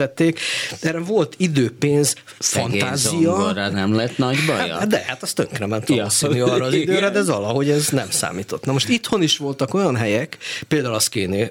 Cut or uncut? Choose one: cut